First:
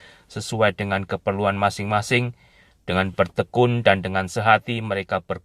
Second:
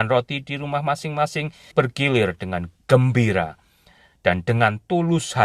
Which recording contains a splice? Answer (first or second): second